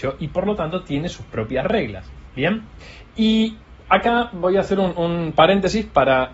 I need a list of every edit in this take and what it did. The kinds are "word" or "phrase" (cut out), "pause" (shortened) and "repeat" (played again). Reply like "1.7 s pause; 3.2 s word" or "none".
none